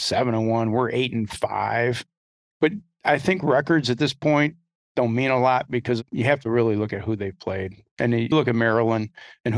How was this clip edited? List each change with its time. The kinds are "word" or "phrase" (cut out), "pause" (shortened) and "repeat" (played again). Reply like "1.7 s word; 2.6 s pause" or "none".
8.3 s word